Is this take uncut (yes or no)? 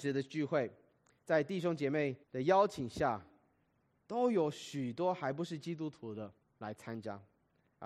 no